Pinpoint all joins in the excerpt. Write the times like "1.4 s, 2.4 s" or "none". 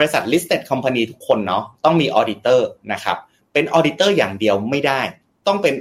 none